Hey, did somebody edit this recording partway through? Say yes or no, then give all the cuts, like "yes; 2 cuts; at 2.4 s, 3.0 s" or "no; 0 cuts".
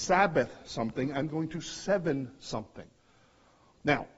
no; 0 cuts